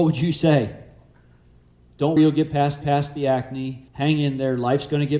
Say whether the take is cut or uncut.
cut